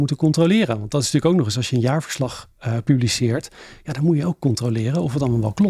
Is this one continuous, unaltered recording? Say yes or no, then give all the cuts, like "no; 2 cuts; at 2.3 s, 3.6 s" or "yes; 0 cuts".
yes; 0 cuts